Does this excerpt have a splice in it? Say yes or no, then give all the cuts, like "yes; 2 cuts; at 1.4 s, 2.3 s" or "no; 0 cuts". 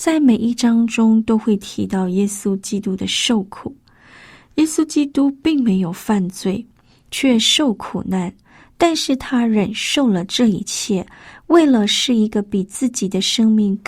no; 0 cuts